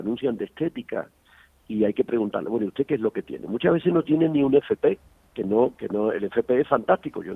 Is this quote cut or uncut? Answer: uncut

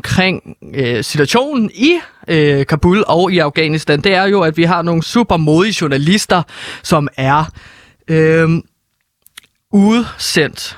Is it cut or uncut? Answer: uncut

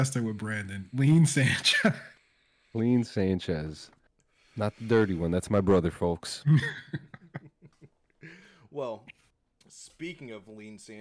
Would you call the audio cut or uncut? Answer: uncut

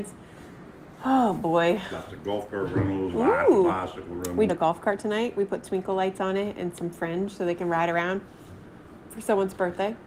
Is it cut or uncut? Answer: cut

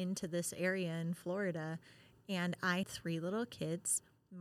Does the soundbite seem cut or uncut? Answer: cut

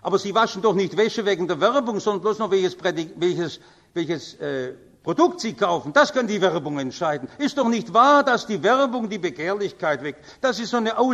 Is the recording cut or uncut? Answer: uncut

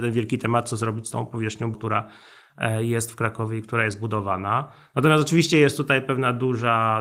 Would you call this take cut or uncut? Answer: cut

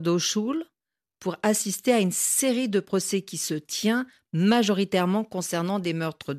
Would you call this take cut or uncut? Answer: uncut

